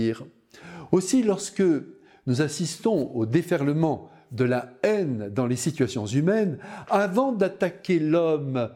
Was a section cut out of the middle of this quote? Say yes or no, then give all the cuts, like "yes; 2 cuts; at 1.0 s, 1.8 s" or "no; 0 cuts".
no; 0 cuts